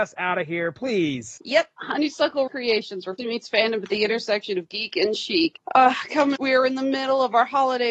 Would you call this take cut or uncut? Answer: cut